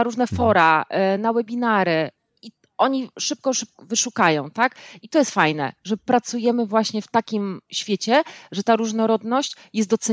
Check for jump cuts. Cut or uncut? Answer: uncut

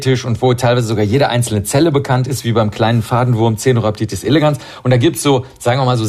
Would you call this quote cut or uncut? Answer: uncut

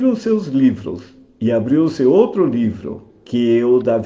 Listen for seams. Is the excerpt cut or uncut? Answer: uncut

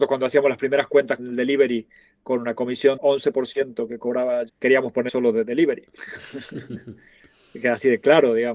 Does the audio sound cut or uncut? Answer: cut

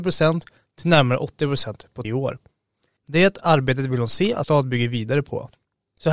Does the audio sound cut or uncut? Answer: cut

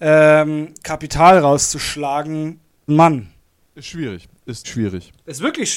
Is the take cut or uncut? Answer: cut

